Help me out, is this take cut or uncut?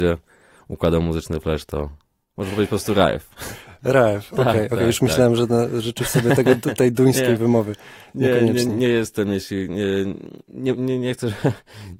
uncut